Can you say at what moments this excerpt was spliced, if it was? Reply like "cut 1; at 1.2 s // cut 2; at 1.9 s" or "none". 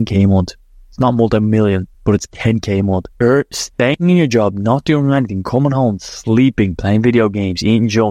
cut 1; at 1.9 s // cut 2; at 3.1 s

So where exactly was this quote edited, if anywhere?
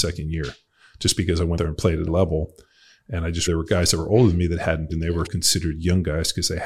cut 1; at 1.6 s // cut 2; at 2.1 s // cut 3; at 3.5 s // cut 4; at 4.9 s // cut 5; at 5.3 s

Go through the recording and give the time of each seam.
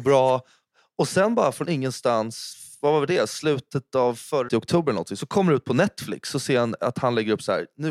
cut 1; at 4.5 s

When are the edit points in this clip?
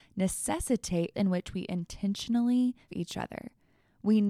cut 1; at 1.1 s // cut 2; at 2.9 s

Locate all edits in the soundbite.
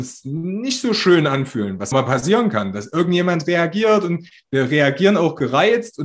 cut 1; at 1.9 s

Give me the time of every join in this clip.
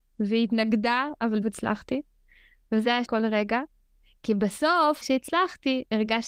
cut 1; at 1.4 s // cut 2; at 3.0 s // cut 3; at 5.0 s

